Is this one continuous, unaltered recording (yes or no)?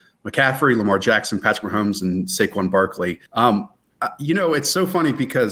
no